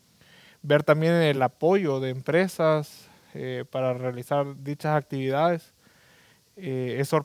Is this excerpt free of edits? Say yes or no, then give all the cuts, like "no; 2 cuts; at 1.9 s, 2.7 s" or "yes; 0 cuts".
yes; 0 cuts